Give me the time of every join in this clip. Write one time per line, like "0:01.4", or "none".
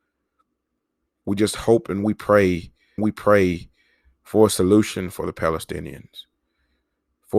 0:03.0